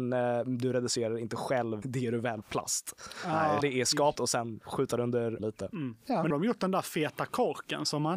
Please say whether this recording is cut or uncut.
cut